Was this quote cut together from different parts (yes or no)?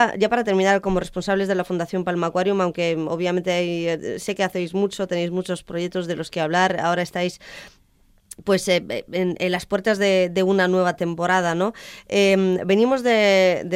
no